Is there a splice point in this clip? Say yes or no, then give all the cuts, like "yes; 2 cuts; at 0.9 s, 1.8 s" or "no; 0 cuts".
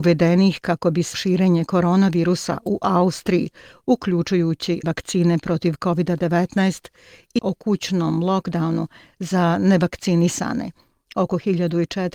yes; 3 cuts; at 1.1 s, 4.8 s, 7.4 s